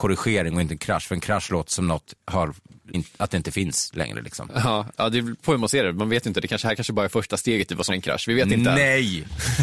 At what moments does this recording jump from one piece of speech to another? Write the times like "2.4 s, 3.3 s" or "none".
2.9 s, 7.9 s